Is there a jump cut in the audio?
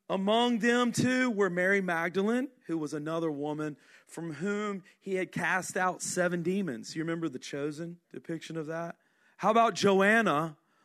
yes; 1 cut; at 8.0 s

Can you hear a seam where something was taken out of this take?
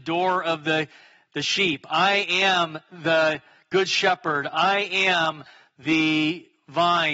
no; 0 cuts

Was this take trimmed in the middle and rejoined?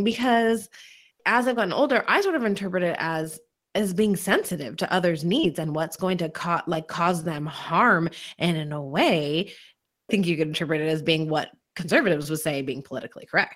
yes; 1 cut; at 10.1 s

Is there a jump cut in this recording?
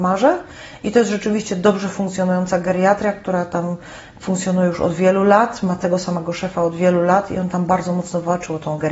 no; 0 cuts

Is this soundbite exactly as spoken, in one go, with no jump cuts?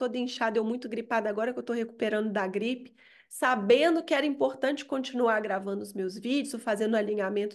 yes; 0 cuts

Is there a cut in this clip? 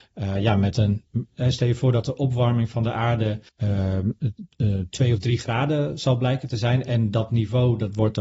yes; 1 cut; at 3.5 s

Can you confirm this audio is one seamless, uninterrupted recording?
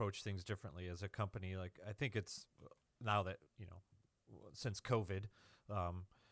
no; 1 cut; at 3.5 s

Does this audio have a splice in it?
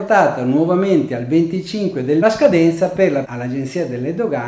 yes; 2 cuts; at 2.2 s, 3.2 s

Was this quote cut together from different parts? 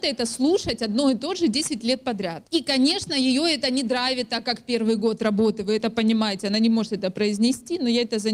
yes; 1 cut; at 2.5 s

